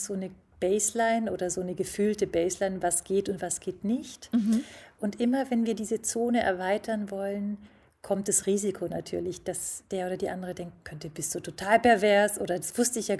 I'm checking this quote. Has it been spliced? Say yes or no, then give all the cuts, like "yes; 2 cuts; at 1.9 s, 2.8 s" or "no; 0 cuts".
no; 0 cuts